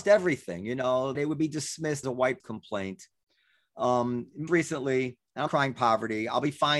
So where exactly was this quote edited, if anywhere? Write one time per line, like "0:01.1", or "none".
0:01.1
0:02.0
0:02.4
0:04.5
0:05.5